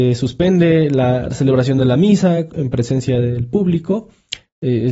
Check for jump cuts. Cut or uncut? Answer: uncut